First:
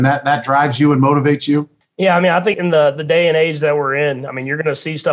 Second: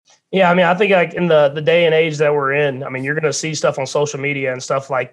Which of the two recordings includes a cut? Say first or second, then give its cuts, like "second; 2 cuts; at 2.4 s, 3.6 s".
first; 2 cuts; at 1.8 s, 2.5 s